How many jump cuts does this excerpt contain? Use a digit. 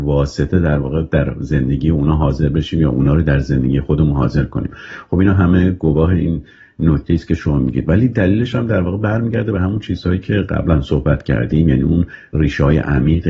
0